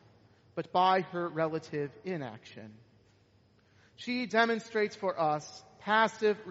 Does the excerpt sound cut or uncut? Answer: uncut